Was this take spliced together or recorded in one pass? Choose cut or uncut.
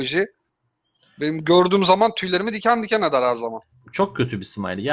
uncut